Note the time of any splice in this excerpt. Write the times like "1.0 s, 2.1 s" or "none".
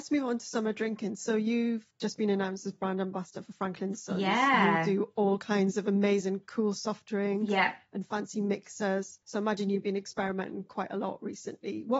1.9 s, 9.2 s